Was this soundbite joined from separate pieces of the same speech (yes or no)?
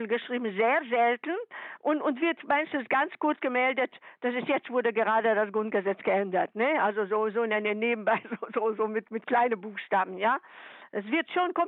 no